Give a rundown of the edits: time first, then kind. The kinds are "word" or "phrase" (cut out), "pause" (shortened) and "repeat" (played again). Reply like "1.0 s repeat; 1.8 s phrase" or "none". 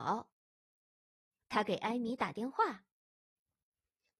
none